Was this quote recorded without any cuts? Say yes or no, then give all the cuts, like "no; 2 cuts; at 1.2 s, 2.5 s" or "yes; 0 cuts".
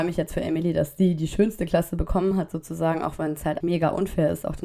no; 1 cut; at 3.6 s